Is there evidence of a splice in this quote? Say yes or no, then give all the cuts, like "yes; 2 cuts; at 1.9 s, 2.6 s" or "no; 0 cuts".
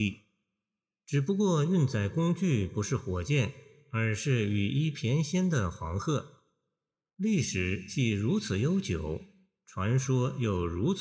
no; 0 cuts